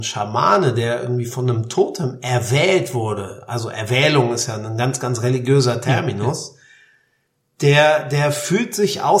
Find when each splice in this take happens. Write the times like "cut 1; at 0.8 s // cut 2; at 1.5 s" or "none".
none